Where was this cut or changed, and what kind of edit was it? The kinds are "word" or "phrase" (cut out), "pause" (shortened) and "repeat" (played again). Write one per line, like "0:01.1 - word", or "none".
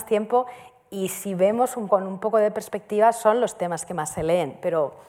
0:01.9 - word